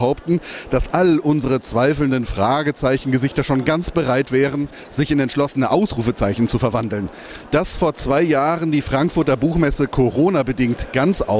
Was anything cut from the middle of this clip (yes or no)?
no